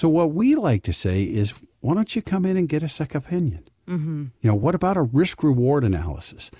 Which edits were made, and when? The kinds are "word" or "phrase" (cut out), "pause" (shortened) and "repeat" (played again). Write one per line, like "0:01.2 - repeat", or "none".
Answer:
0:04.4 - pause